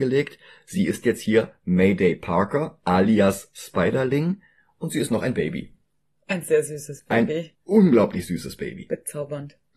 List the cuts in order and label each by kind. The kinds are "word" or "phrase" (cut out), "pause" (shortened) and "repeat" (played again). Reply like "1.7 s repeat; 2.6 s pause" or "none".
7.5 s pause